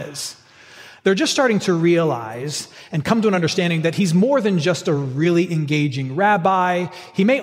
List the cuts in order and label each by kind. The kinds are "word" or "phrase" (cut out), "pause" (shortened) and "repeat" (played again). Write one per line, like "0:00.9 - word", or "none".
none